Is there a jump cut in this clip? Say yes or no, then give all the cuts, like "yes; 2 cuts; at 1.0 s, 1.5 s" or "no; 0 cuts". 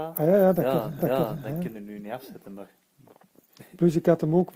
yes; 2 cuts; at 1.0 s, 1.7 s